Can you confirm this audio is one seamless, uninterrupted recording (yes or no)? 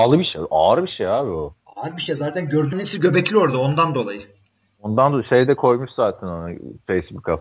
no